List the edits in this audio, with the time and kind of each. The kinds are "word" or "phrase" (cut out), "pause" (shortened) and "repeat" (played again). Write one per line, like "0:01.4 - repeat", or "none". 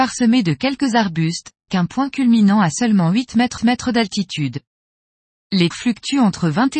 0:01.7 - word
0:03.6 - repeat
0:05.7 - word

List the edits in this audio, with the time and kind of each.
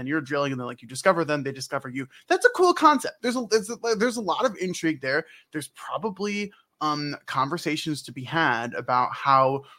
none

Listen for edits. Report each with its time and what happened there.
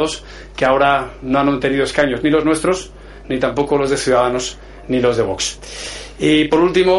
none

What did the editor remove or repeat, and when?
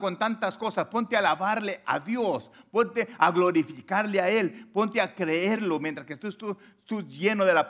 none

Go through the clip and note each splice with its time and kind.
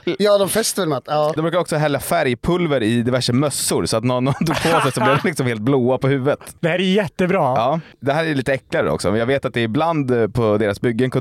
none

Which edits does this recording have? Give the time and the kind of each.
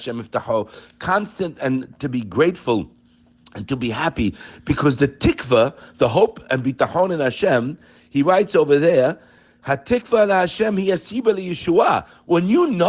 none

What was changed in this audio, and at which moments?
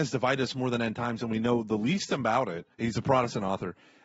0:02.7 - pause

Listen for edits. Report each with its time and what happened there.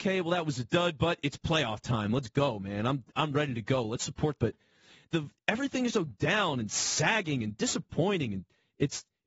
0:04.4 - phrase
0:05.9 - word

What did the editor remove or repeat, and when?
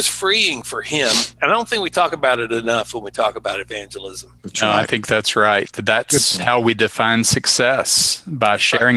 0:01.3 - pause
0:04.4 - pause

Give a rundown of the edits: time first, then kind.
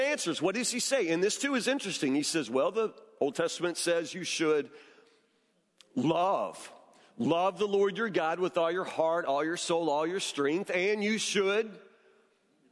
none

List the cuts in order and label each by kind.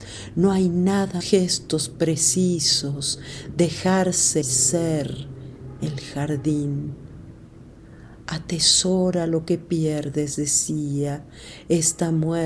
0:01.2 - phrase
0:04.4 - phrase

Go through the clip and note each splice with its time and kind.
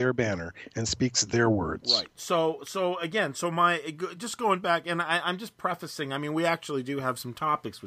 none

